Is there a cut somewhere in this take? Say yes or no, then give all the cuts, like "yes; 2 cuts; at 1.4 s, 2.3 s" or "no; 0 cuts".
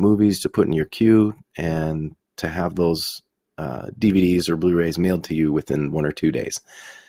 no; 0 cuts